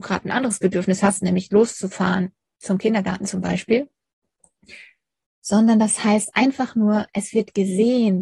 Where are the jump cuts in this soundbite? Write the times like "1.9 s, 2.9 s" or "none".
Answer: none